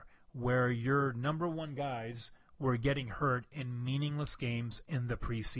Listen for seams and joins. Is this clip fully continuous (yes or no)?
yes